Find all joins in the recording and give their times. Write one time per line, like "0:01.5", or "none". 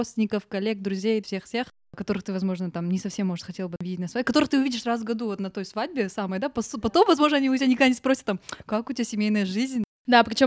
none